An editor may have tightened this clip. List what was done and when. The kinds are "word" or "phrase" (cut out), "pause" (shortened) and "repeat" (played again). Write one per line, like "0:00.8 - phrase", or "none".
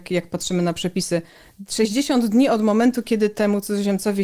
none